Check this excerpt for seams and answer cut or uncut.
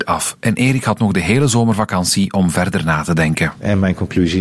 uncut